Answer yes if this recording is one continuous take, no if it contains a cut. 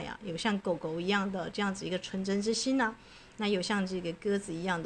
yes